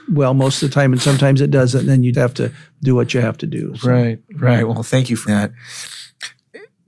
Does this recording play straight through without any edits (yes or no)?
no